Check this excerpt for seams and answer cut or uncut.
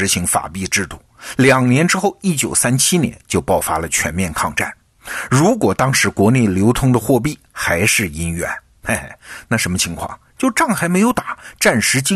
uncut